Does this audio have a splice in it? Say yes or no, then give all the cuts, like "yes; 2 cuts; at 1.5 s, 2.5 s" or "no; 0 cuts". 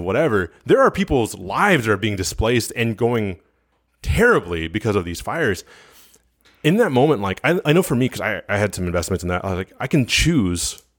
no; 0 cuts